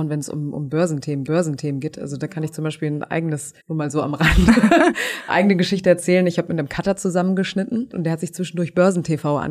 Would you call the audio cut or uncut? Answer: cut